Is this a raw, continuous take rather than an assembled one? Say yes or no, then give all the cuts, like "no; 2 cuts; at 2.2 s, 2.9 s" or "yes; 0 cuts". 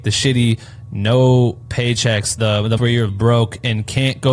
no; 3 cuts; at 2.4 s, 2.8 s, 3.1 s